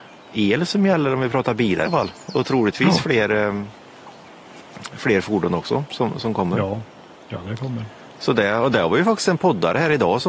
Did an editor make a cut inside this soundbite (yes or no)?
yes